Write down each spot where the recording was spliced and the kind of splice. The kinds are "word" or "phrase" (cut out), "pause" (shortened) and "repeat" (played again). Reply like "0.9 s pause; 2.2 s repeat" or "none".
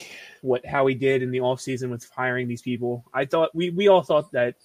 none